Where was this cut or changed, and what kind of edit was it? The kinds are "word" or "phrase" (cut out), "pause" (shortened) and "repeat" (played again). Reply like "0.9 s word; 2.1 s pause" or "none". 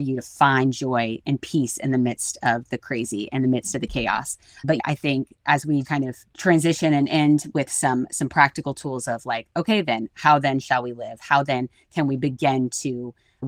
5.8 s word